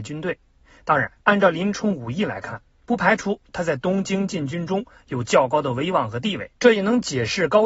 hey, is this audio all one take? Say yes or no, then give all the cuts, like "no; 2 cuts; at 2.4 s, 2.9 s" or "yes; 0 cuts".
no; 2 cuts; at 1.2 s, 6.6 s